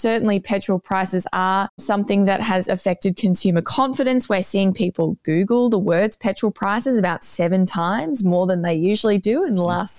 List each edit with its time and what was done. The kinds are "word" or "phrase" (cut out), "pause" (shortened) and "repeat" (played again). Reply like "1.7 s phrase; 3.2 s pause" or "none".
none